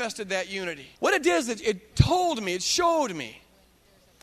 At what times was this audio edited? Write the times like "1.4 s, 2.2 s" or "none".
1.0 s, 1.6 s